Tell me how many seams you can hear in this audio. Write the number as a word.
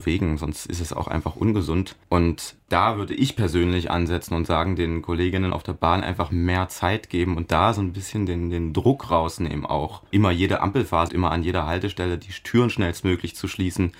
two